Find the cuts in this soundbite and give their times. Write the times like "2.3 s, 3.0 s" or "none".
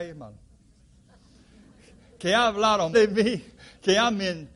2.9 s